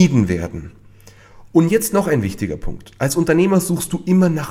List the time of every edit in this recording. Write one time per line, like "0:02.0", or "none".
none